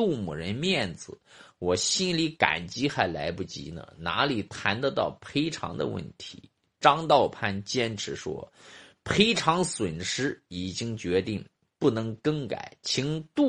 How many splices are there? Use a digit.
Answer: 0